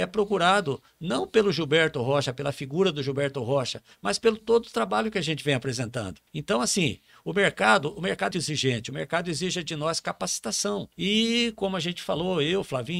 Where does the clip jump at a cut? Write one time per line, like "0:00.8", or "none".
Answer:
0:06.3
0:08.3
0:10.9